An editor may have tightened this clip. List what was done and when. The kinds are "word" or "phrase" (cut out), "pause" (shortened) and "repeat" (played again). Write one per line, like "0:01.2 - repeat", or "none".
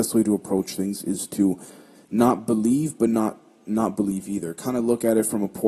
none